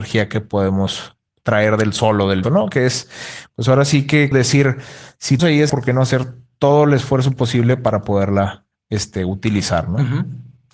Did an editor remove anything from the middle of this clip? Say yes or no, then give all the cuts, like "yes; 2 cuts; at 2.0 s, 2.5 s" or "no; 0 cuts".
yes; 4 cuts; at 2.4 s, 4.3 s, 5.4 s, 5.7 s